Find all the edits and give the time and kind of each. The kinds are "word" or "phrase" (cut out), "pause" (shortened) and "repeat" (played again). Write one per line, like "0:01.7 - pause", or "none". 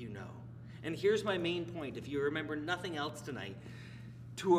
none

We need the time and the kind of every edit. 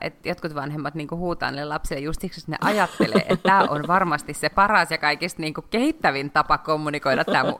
none

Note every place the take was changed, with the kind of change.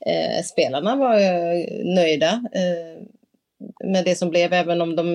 0:03.8 - word

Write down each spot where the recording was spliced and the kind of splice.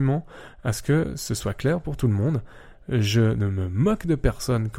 none

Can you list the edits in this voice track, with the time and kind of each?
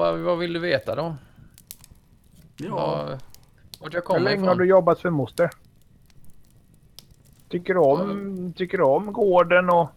none

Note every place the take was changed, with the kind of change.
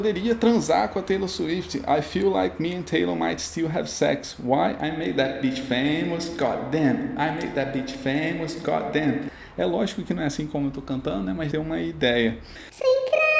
0:11.5 - phrase

